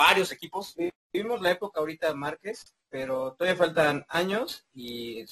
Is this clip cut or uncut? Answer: uncut